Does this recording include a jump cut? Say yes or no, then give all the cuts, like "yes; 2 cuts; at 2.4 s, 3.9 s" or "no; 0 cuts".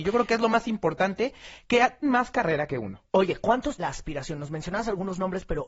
yes; 3 cuts; at 2.0 s, 3.1 s, 3.8 s